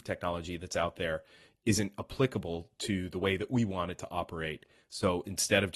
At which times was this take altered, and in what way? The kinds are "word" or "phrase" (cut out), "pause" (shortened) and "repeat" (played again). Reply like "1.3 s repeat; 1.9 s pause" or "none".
none